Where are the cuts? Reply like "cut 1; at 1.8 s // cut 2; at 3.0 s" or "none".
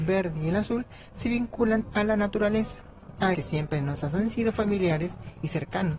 cut 1; at 3.3 s

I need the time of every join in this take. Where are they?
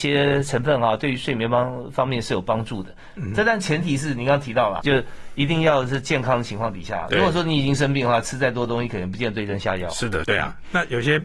cut 1; at 4.8 s // cut 2; at 10.2 s

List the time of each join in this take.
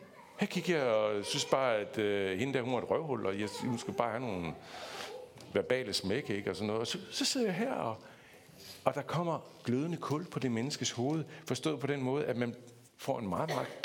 cut 1; at 12.9 s

